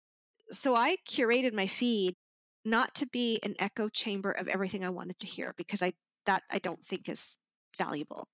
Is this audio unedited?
yes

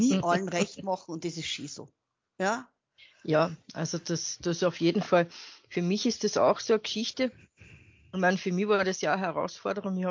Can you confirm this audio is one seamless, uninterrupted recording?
yes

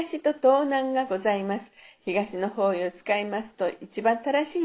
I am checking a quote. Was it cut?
no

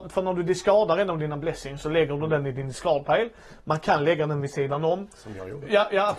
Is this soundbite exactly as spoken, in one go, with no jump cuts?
yes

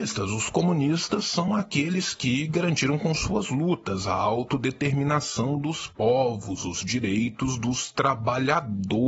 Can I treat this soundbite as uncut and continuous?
yes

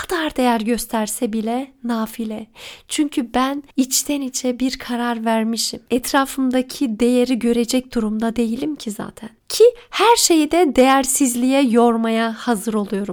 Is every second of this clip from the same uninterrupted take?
no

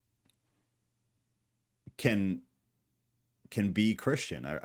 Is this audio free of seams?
yes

